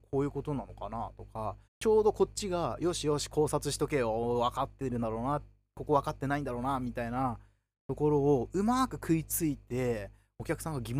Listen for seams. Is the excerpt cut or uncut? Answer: cut